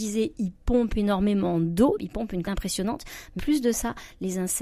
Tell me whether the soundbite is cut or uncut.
cut